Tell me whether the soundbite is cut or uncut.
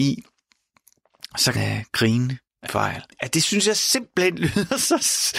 cut